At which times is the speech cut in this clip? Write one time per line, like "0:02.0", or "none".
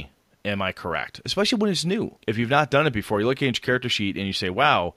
0:02.2